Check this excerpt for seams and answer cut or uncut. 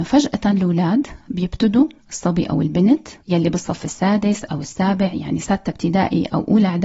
uncut